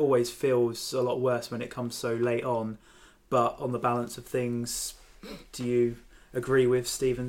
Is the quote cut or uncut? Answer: uncut